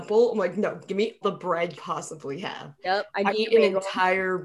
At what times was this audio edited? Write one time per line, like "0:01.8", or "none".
0:01.2
0:01.7
0:03.3